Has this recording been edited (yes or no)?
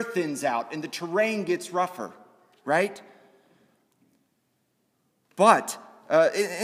no